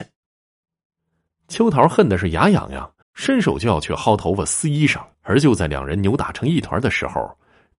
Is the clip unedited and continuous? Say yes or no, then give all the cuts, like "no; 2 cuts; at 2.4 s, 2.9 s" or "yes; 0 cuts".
no; 2 cuts; at 3.0 s, 5.1 s